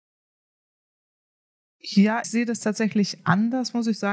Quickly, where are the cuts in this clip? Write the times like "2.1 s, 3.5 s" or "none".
2.2 s